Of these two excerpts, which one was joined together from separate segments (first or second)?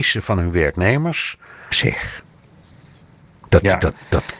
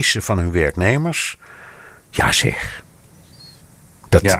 first